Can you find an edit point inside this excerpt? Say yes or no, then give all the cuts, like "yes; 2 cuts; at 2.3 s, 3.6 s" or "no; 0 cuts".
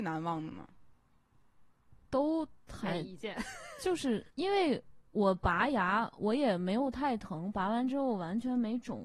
yes; 2 cuts; at 4.3 s, 5.1 s